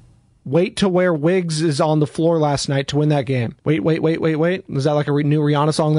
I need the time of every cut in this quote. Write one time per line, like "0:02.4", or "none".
0:03.6